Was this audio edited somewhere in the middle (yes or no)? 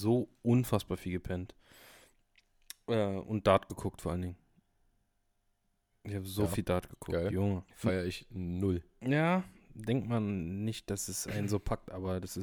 yes